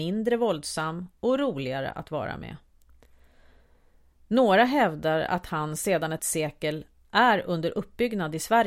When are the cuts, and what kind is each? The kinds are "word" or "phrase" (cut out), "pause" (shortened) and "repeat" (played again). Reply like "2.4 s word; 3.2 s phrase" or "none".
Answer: 6.2 s word